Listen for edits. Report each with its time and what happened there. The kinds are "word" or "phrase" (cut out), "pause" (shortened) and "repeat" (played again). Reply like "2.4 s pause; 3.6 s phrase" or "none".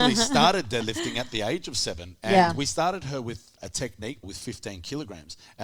3.6 s word; 4.2 s word